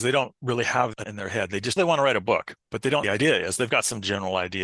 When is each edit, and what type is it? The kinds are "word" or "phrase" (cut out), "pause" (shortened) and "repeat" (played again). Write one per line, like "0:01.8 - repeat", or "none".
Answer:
0:01.0 - word
0:01.8 - phrase
0:03.0 - phrase

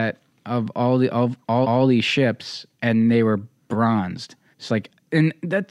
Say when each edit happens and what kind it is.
0:01.6 - repeat
0:02.7 - pause
0:04.5 - pause

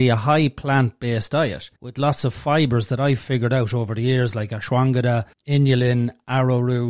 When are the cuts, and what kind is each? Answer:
0:01.8 - pause
0:05.3 - pause

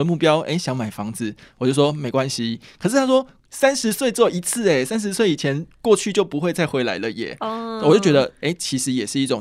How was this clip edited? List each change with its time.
none

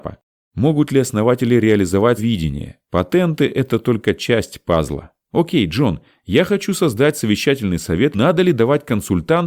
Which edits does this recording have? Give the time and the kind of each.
0:02.2 - word
0:02.8 - pause
0:05.2 - pause
0:08.1 - phrase

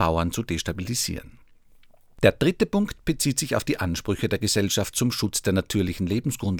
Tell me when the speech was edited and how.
none

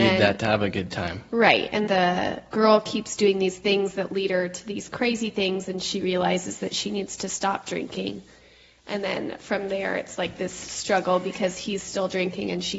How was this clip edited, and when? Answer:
0:01.9 - word

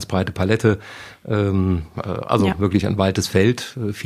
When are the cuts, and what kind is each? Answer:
0:01.9 - word

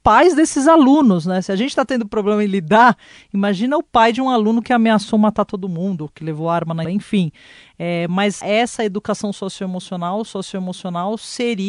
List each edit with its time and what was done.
0:06.8 - word
0:08.4 - word
0:10.3 - repeat

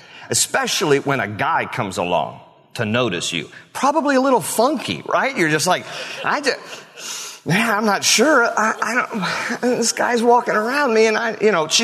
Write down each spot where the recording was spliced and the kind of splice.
none

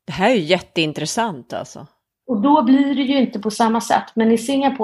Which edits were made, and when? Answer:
none

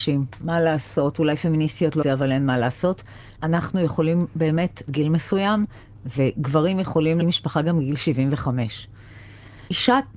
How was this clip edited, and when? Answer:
0:02.0 - phrase
0:04.9 - phrase
0:07.2 - word

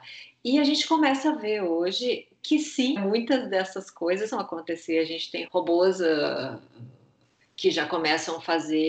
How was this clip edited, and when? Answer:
0:02.4 - word
0:03.0 - word
0:04.3 - word
0:05.5 - word

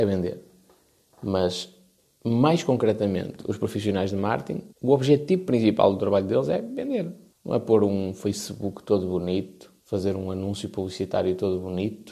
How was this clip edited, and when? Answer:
0:04.7 - pause
0:07.3 - pause
0:09.8 - pause

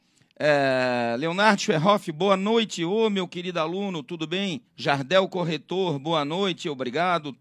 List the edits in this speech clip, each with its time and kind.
0:04.7 - pause

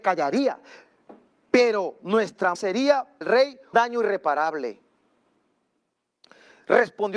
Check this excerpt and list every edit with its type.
0:02.6 - word
0:03.2 - word
0:03.7 - word

